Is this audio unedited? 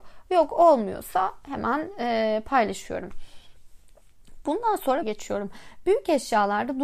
no; 1 cut; at 5.0 s

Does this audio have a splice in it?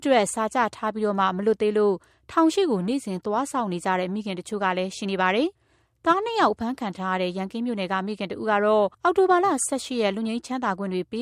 yes; 2 cuts; at 5.6 s, 8.9 s

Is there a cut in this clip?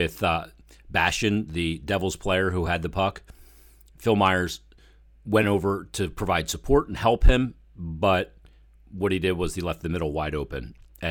no; 0 cuts

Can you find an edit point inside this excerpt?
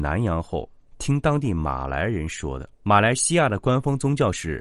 yes; 1 cut; at 2.7 s

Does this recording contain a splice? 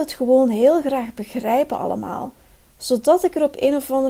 no; 0 cuts

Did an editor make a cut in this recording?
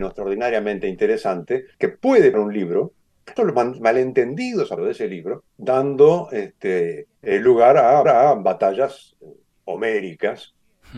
yes; 7 cuts; at 1.7 s, 2.3 s, 3.4 s, 4.8 s, 5.5 s, 7.2 s, 8.0 s

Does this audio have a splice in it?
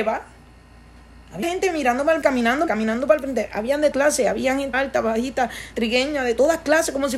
yes; 6 cuts; at 1.4 s, 2.2 s, 2.7 s, 3.9 s, 4.7 s, 5.7 s

